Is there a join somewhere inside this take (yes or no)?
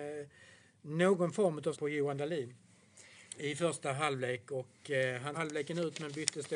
yes